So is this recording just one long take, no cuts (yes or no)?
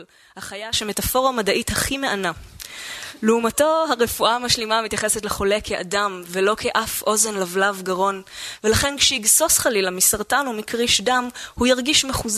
yes